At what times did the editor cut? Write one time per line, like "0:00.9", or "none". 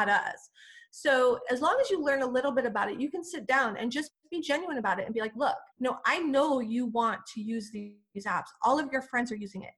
0:04.2
0:05.7